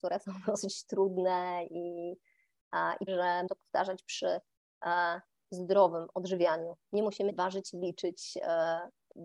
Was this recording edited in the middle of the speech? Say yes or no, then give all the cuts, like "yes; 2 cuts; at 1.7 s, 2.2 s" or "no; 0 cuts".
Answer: yes; 5 cuts; at 3.1 s, 3.5 s, 5.4 s, 7.3 s, 7.7 s